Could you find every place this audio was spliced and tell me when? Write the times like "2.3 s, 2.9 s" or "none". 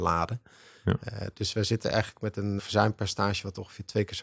2.6 s